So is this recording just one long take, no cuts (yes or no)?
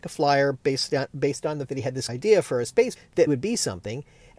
no